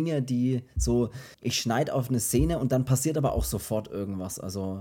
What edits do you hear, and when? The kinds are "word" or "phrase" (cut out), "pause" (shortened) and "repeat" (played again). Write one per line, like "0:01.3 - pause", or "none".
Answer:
0:01.3 - pause